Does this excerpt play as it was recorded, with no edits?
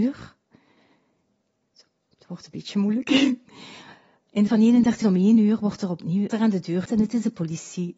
no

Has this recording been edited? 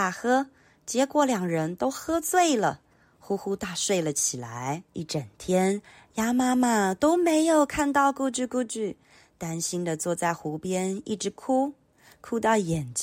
yes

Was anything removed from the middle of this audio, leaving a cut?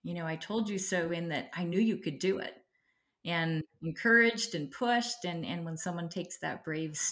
no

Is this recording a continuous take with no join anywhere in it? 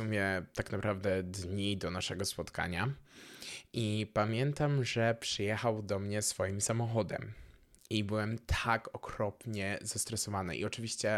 yes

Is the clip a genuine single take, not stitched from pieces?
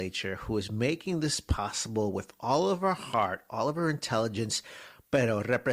yes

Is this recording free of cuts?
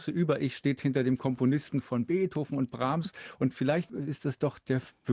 yes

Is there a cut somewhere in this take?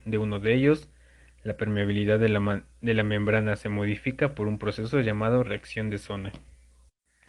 no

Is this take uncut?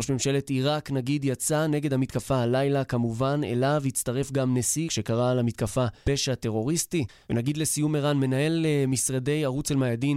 no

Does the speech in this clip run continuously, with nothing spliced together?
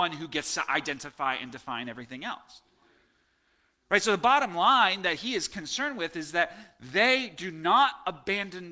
yes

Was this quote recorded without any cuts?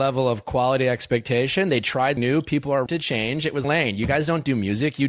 no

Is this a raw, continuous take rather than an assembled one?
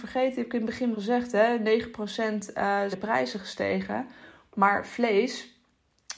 no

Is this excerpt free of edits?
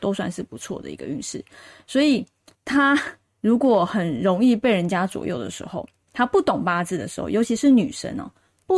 yes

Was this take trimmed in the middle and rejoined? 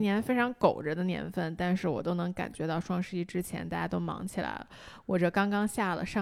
no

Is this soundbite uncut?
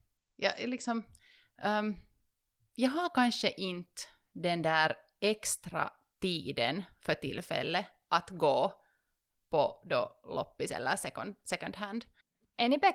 yes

